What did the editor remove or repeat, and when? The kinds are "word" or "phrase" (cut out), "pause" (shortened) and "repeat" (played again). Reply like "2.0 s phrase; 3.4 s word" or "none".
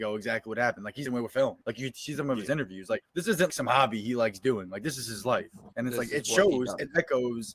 1.1 s phrase; 1.6 s pause; 3.1 s pause; 3.5 s word; 5.7 s pause